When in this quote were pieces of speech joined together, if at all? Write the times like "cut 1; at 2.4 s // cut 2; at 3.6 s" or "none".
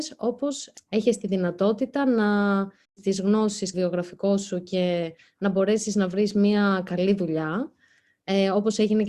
cut 1; at 2.8 s // cut 2; at 3.7 s